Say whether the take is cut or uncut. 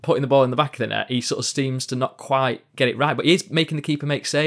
uncut